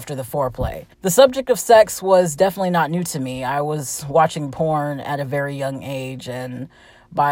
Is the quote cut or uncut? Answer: cut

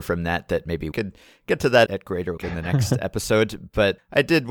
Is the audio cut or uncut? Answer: cut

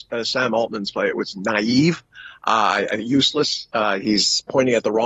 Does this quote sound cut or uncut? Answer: uncut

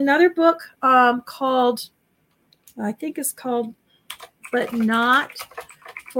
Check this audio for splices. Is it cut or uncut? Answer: uncut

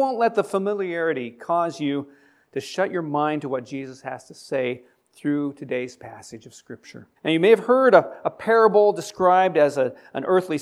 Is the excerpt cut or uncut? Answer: cut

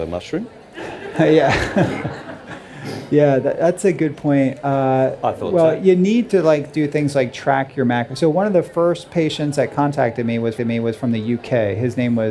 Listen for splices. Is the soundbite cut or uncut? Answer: cut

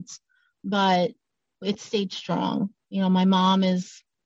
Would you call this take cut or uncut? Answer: uncut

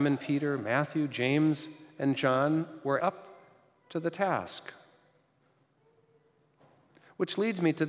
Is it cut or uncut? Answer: cut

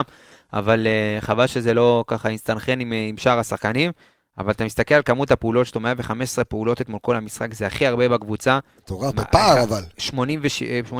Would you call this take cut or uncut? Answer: uncut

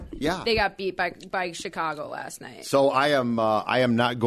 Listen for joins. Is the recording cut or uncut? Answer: uncut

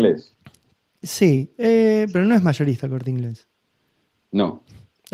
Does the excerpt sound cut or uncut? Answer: uncut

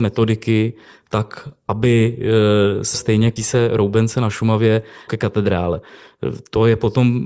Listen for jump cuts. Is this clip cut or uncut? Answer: cut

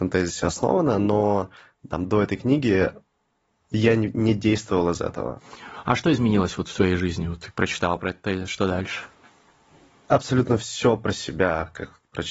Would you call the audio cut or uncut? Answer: uncut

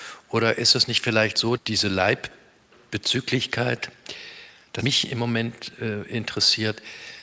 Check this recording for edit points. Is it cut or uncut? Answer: cut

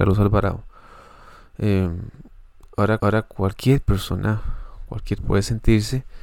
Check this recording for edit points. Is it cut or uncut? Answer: cut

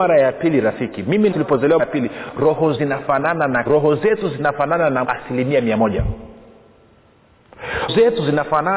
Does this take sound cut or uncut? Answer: cut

